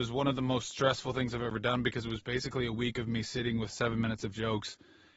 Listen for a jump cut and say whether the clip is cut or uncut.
uncut